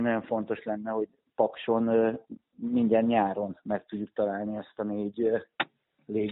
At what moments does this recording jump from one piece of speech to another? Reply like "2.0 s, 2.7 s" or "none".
none